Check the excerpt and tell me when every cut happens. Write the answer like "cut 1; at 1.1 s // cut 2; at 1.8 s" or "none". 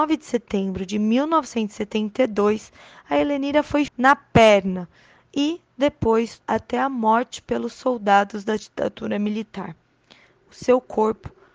cut 1; at 3.9 s // cut 2; at 6.4 s